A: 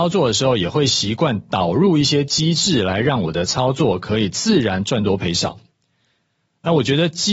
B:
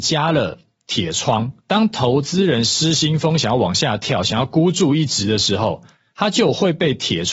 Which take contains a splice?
B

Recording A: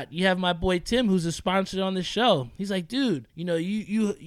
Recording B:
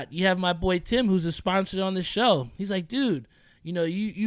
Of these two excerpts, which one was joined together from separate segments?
A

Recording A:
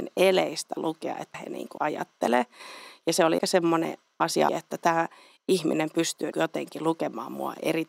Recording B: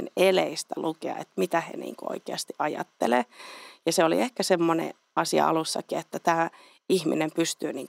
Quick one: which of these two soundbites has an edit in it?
A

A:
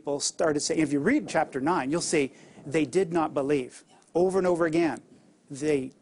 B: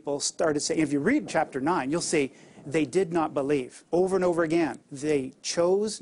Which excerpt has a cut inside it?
B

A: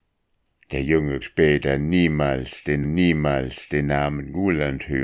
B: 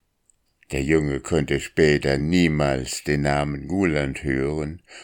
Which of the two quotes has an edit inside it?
A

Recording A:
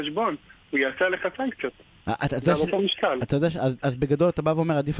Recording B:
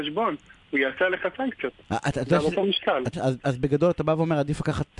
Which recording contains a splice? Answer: B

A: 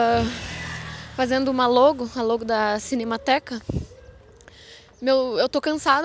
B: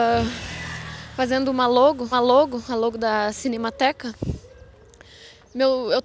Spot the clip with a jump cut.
B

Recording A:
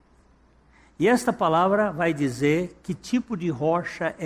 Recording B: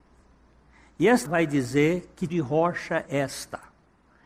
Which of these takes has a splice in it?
B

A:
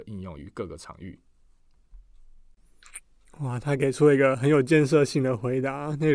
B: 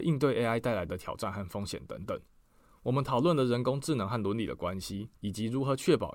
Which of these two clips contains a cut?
B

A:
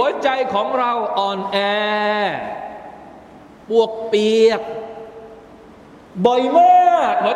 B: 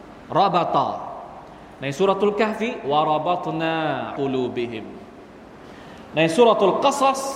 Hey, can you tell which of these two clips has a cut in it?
B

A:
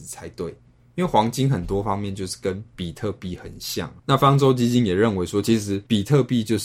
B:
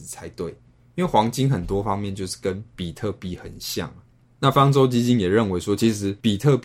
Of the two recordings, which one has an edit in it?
A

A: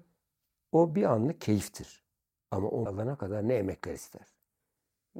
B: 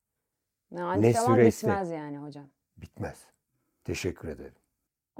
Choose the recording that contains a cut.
A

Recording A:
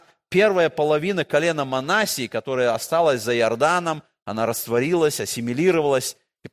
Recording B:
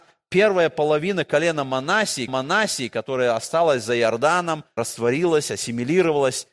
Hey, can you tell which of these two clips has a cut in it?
B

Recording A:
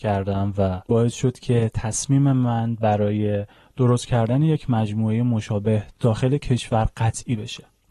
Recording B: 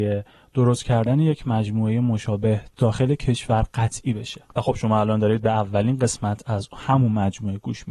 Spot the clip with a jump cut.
B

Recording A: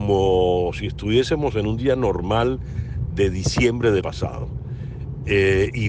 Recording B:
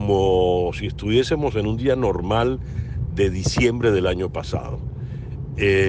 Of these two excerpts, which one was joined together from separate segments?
A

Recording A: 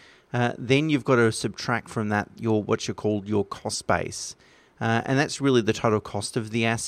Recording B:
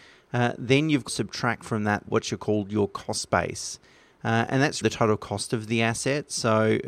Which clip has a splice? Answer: B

